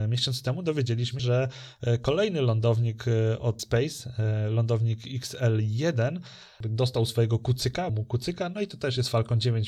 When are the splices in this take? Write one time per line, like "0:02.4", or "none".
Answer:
0:01.2
0:03.6
0:07.9